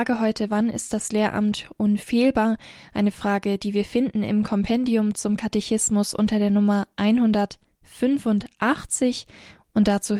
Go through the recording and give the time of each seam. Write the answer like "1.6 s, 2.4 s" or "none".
none